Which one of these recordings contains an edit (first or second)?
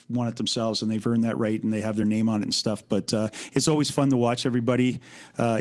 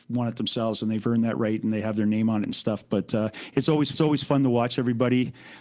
second